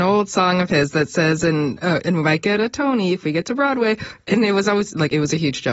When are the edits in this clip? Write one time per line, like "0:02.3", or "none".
none